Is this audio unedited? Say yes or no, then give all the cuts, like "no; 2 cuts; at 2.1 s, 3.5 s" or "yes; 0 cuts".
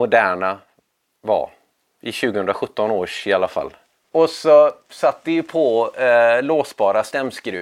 yes; 0 cuts